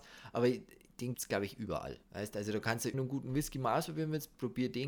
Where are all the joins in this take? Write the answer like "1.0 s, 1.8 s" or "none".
1.1 s, 2.0 s, 2.9 s